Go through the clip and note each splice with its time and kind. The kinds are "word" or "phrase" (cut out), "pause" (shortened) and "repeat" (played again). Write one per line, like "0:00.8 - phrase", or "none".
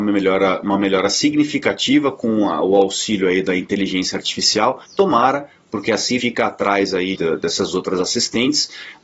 0:04.8 - pause
0:06.2 - word
0:07.1 - word